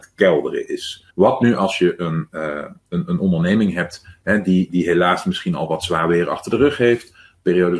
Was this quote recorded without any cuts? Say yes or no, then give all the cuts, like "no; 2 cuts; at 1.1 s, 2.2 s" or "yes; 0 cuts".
no; 1 cut; at 1.1 s